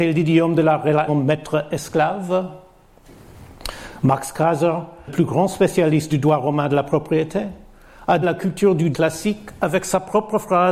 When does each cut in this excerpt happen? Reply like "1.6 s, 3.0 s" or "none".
1.1 s, 5.1 s, 6.1 s, 8.2 s, 8.9 s